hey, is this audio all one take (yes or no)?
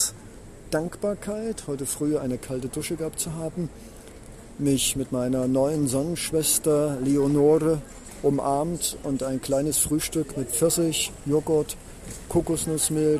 yes